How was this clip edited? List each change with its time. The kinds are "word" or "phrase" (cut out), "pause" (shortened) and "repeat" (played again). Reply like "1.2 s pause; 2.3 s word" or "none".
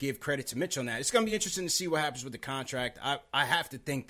none